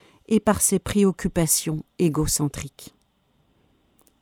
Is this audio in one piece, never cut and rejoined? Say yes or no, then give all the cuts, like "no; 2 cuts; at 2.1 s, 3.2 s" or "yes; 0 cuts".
yes; 0 cuts